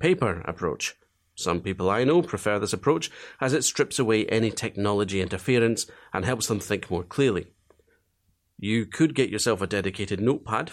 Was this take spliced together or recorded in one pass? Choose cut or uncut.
uncut